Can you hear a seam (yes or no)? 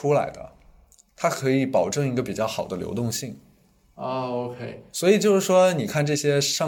no